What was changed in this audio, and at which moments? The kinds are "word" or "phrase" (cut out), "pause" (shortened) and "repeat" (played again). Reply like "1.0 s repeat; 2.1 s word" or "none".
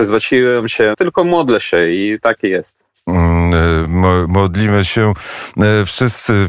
0.9 s word